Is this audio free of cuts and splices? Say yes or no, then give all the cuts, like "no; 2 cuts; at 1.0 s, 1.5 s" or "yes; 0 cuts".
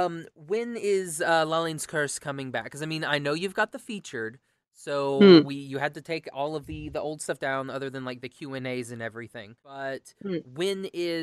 no; 1 cut; at 9.6 s